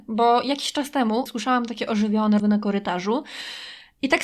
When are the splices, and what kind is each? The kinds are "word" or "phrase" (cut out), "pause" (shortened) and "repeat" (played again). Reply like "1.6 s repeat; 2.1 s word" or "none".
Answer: 1.3 s word; 2.4 s word